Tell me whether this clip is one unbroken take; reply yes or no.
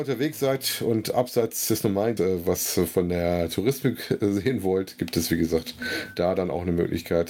no